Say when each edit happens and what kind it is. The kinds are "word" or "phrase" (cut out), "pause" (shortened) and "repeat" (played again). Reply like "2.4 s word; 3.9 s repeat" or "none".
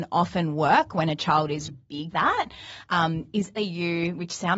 1.7 s word; 2.1 s word; 3.6 s word